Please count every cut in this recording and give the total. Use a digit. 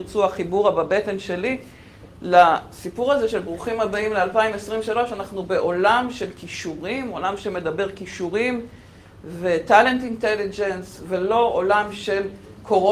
0